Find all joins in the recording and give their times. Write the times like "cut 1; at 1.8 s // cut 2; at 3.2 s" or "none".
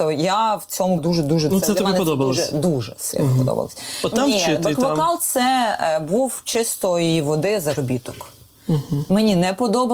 cut 1; at 1.0 s // cut 2; at 1.5 s // cut 3; at 4.1 s